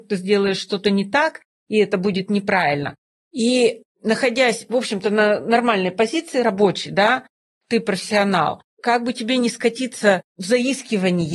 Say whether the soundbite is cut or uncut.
uncut